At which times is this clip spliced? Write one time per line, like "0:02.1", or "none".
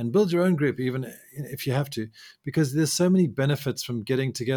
none